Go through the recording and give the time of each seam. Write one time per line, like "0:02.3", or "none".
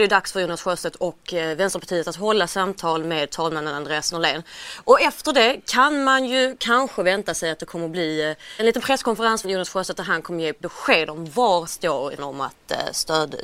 0:08.6
0:09.4
0:11.7
0:12.2